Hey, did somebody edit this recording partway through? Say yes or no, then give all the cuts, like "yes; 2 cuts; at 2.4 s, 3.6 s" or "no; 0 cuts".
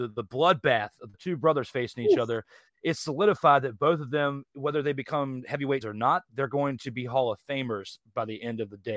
yes; 1 cut; at 5.8 s